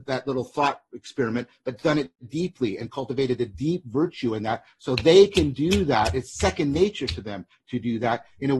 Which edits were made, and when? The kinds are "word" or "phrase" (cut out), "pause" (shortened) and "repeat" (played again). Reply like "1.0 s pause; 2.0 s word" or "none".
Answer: none

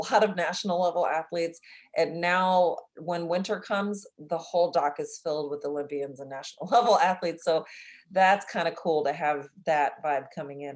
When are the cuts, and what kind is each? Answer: none

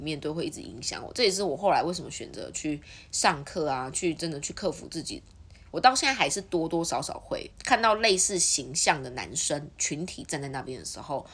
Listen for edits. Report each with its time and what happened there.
7.5 s pause

